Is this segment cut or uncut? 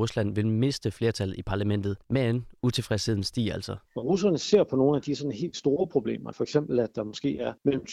cut